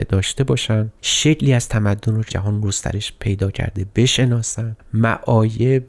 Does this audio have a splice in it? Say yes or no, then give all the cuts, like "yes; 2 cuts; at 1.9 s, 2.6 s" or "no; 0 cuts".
yes; 2 cuts; at 1.0 s, 2.3 s